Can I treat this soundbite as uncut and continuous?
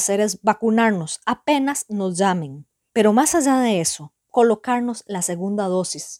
yes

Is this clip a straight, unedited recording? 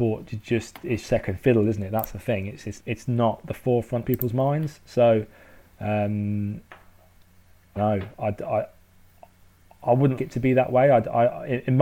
no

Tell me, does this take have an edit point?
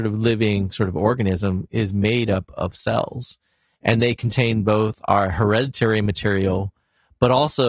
no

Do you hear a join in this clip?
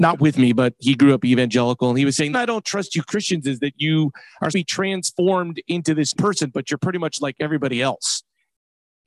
yes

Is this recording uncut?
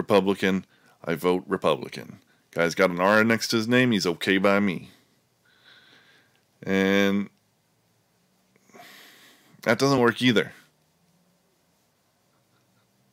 yes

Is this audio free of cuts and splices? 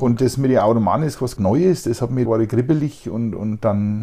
no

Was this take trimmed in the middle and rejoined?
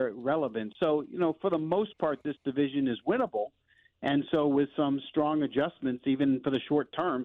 no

